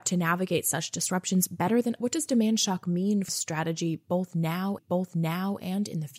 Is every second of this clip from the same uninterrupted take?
no; 3 cuts; at 2.0 s, 3.3 s, 4.8 s

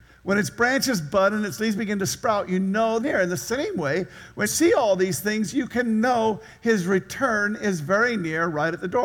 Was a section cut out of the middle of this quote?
yes; 2 cuts; at 3.0 s, 4.5 s

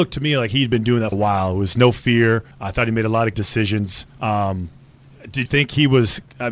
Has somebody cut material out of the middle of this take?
yes; 5 cuts; at 1.1 s, 2.5 s, 3.3 s, 4.1 s, 5.5 s

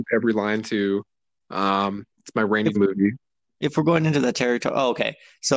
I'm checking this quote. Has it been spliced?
yes; 1 cut; at 2.7 s

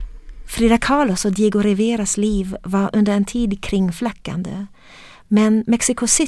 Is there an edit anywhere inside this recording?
no; 0 cuts

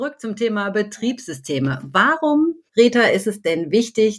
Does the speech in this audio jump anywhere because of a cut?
yes; 1 cut; at 2.7 s

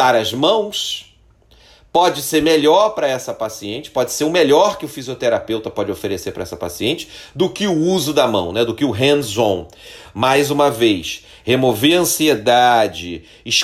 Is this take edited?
no; 0 cuts

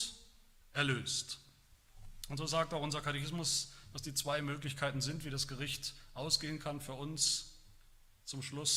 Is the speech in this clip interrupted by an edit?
no; 0 cuts

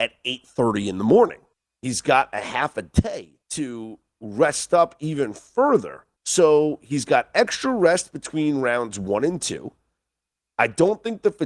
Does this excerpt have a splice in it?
yes; 3 cuts; at 1.5 s, 3.4 s, 6.2 s

